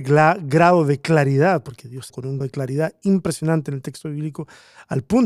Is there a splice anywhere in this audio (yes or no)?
yes